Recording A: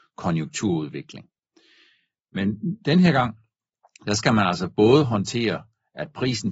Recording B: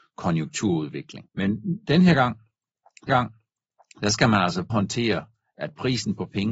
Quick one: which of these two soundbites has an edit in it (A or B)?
B